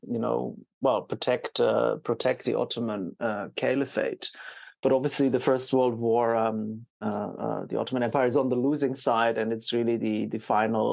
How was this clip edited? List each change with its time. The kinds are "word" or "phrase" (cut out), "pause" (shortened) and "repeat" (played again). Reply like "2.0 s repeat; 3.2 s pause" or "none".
6.9 s pause